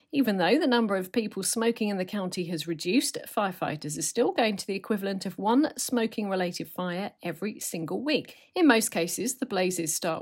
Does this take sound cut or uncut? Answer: uncut